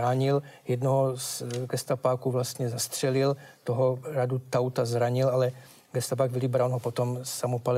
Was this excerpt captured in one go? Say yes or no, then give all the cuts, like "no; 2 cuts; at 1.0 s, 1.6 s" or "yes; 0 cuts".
yes; 0 cuts